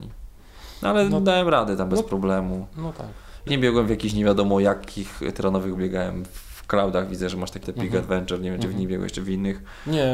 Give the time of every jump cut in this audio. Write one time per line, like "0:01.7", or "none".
0:03.5
0:05.8
0:07.6